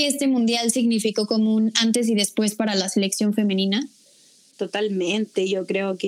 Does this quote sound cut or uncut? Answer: uncut